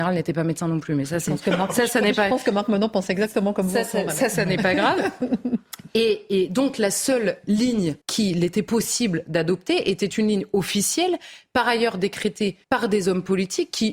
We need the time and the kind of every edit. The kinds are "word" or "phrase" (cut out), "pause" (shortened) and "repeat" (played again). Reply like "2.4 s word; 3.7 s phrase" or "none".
8.0 s pause; 12.6 s pause